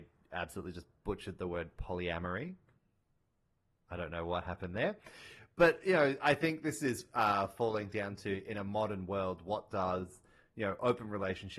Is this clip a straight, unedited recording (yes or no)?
yes